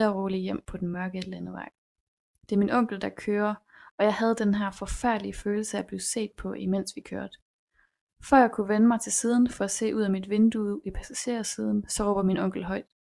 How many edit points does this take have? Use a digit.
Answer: 0